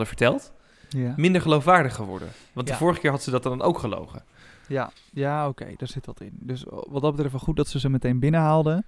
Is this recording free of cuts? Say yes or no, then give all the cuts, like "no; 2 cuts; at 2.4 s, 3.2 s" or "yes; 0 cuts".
yes; 0 cuts